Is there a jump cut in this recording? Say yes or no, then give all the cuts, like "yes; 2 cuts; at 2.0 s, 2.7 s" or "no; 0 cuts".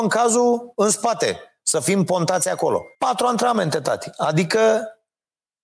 yes; 1 cut; at 2.9 s